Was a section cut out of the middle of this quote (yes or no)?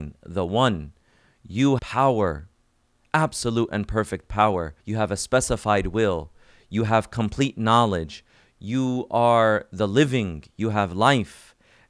yes